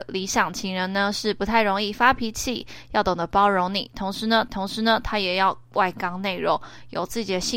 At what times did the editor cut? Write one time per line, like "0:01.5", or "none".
0:04.5